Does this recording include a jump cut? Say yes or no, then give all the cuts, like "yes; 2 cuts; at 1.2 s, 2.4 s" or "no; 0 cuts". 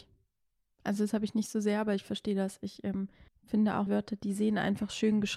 yes; 2 cuts; at 3.3 s, 3.9 s